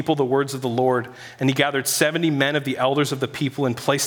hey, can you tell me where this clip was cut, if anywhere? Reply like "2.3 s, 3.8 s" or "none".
none